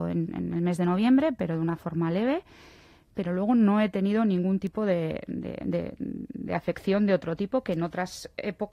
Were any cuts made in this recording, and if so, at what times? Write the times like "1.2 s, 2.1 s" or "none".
none

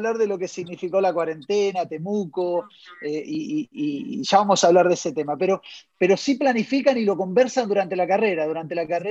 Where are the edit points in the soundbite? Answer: none

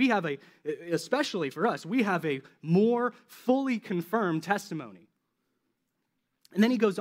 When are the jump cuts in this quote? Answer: none

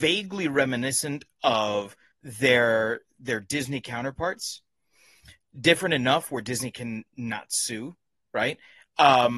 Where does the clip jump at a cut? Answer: 2.1 s

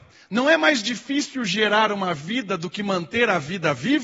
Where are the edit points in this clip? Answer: none

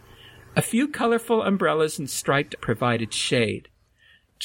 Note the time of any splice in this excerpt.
2.6 s

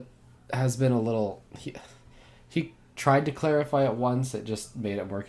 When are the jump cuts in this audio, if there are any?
none

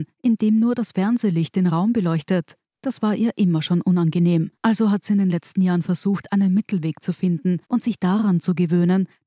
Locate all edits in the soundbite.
4.5 s, 7.6 s

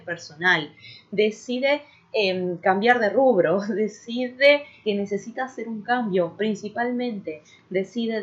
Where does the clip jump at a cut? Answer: 4.8 s, 6.4 s

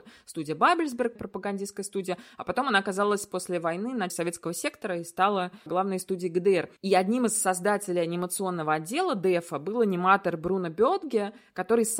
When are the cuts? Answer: 1.2 s, 4.1 s, 5.7 s, 6.8 s

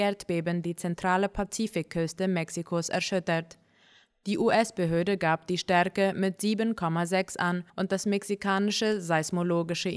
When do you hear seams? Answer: 7.7 s

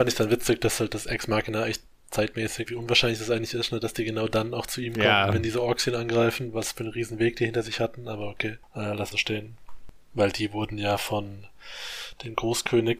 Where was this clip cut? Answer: 2.7 s, 9.1 s

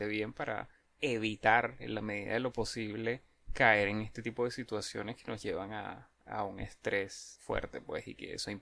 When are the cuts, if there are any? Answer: none

